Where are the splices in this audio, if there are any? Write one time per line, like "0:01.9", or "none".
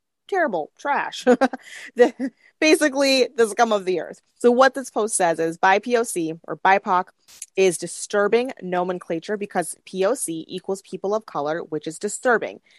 0:04.3